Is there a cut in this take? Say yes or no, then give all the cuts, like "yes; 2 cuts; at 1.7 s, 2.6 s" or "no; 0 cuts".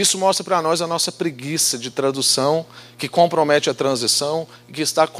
no; 0 cuts